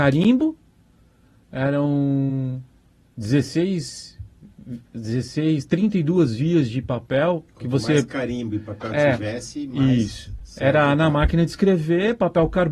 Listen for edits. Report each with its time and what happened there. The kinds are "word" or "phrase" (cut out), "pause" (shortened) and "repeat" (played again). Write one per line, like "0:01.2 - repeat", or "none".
0:04.9 - pause